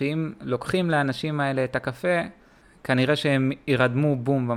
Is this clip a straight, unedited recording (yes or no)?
yes